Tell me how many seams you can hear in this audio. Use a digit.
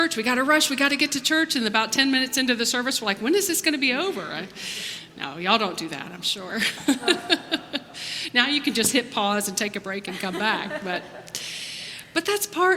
0